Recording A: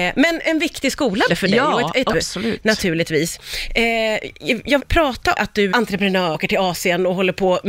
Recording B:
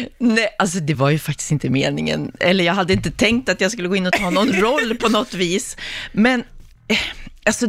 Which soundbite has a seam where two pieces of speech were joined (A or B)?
A